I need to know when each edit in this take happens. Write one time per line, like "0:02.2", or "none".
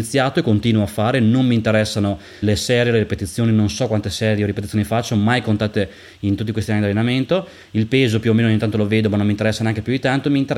0:02.4